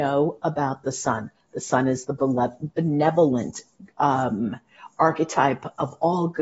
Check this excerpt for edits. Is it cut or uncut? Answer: uncut